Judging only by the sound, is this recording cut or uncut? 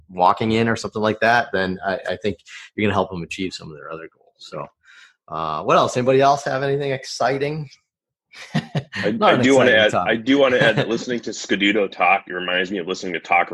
uncut